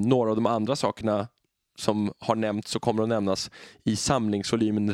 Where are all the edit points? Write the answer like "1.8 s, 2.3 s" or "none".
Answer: none